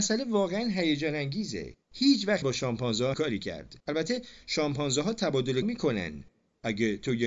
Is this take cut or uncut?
cut